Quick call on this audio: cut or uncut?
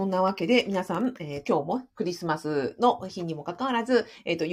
cut